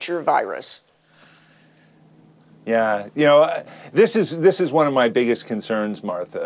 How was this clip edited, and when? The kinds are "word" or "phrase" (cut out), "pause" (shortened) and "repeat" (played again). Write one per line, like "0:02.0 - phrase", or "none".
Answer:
none